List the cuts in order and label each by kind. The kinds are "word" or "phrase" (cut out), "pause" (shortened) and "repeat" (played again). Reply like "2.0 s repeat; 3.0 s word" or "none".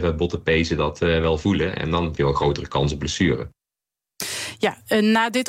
2.2 s word